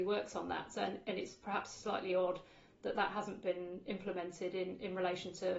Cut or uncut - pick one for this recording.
uncut